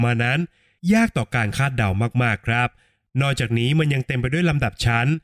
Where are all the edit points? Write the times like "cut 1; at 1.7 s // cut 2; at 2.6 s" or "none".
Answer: none